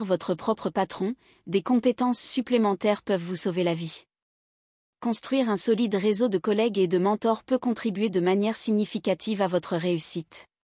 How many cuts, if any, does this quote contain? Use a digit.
0